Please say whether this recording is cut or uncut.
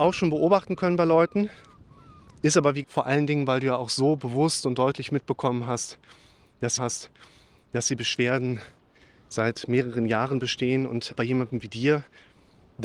cut